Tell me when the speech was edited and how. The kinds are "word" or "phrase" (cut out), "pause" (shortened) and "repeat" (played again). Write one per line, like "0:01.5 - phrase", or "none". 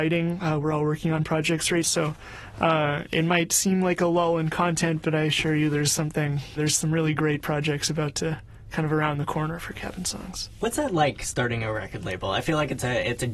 0:01.8 - word
0:06.6 - word